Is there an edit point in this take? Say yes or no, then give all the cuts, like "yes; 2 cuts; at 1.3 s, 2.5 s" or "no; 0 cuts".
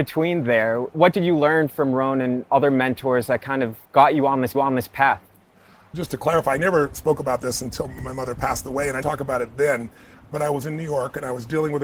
yes; 3 cuts; at 3.8 s, 4.5 s, 9.0 s